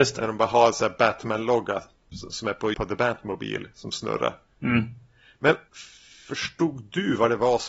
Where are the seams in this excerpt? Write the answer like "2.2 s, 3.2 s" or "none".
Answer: 2.7 s

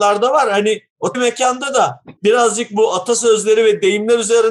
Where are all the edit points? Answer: 1.1 s, 2.2 s

